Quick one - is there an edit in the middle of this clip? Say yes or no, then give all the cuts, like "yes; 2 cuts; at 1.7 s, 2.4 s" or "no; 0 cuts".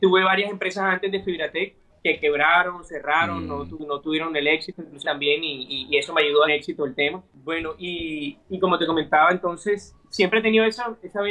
yes; 5 cuts; at 1.9 s, 5.0 s, 6.5 s, 7.3 s, 8.4 s